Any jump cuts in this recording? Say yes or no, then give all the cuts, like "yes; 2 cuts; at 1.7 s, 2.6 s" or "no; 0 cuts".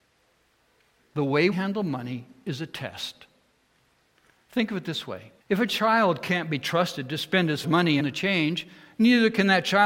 yes; 5 cuts; at 1.5 s, 4.1 s, 5.4 s, 7.6 s, 8.0 s